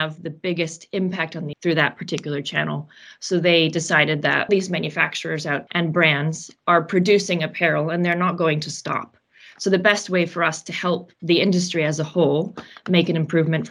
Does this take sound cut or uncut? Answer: cut